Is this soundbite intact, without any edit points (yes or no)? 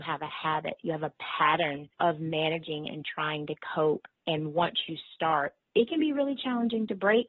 no